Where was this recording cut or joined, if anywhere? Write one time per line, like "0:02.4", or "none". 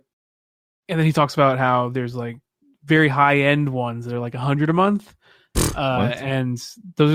none

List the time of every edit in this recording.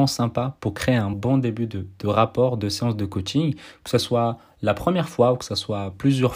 none

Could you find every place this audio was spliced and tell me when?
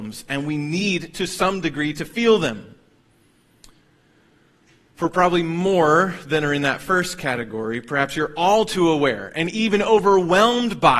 none

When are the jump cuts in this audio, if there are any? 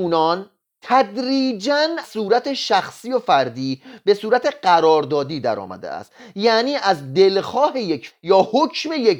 0:02.0
0:08.1

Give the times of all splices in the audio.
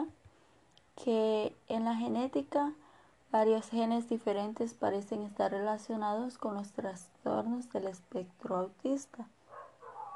none

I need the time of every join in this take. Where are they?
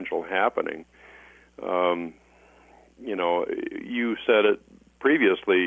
none

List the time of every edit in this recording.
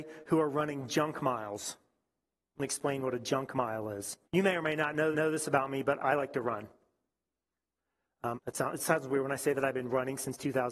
0:04.2
0:05.1
0:06.0
0:08.3

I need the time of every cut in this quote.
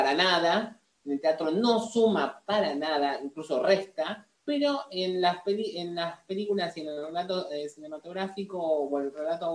0:04.4

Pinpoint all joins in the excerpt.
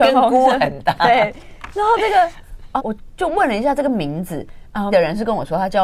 0:02.8
0:04.9

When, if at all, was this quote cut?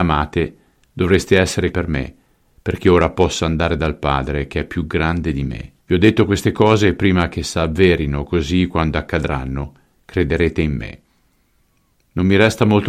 0:01.7
0:05.8

